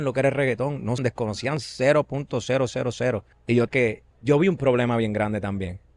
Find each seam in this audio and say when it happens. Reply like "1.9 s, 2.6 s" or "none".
1.0 s, 3.3 s, 3.7 s, 4.1 s